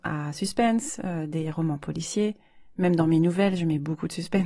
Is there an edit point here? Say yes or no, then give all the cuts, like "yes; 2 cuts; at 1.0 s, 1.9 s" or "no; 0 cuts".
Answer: no; 0 cuts